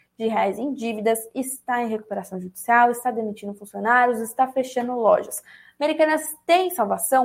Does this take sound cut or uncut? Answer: uncut